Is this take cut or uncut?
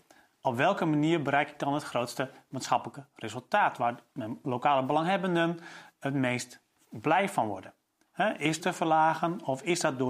cut